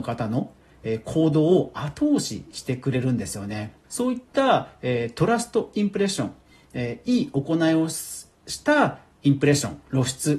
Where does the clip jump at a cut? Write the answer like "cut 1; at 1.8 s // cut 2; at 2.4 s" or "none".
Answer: cut 1; at 3.8 s